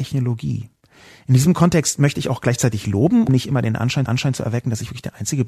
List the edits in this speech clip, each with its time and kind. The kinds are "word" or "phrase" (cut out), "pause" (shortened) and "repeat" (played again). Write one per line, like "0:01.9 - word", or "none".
0:03.3 - word
0:04.1 - repeat